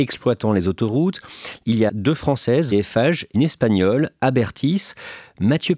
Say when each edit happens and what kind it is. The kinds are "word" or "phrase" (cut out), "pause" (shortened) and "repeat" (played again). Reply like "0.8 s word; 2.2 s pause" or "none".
1.9 s word; 2.7 s word; 3.3 s word